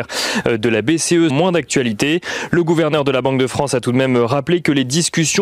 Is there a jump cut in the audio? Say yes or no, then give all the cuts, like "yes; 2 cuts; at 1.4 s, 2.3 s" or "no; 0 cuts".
yes; 1 cut; at 1.3 s